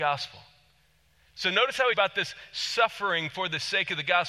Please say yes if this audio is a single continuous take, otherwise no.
no